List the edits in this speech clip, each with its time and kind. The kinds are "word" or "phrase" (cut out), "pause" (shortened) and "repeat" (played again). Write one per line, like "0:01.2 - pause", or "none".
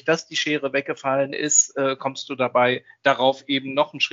none